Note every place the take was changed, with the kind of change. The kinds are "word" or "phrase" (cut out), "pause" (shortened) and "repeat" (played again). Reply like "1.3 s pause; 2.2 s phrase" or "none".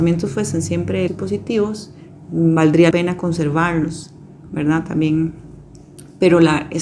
1.1 s word; 2.9 s word